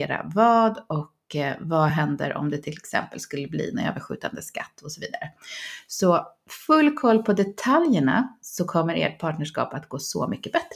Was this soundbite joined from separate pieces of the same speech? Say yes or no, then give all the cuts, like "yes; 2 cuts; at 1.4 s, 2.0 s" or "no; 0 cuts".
no; 0 cuts